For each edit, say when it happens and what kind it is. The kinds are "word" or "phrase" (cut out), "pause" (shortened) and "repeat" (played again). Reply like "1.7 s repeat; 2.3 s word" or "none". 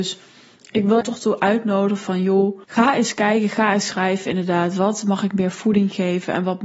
1.0 s phrase; 2.6 s pause